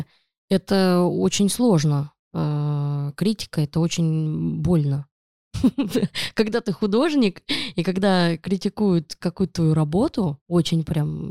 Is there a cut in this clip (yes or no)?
yes